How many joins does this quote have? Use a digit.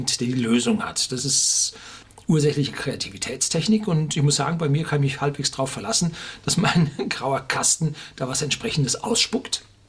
0